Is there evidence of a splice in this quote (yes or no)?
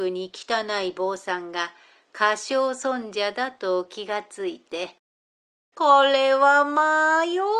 no